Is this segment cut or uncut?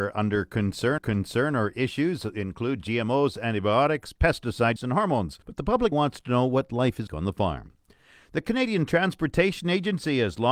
cut